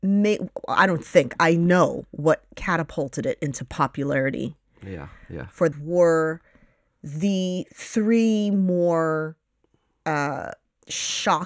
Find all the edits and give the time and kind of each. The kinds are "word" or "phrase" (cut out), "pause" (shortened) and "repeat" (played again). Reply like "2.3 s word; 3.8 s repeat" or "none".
5.7 s word